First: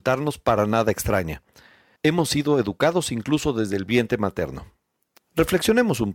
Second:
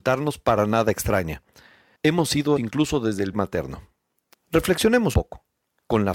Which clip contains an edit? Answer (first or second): second